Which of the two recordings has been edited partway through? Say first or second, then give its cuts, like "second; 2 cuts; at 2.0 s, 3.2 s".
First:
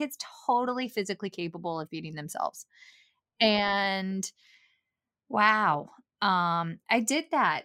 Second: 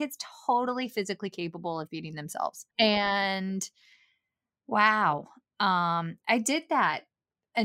second; 1 cut; at 2.7 s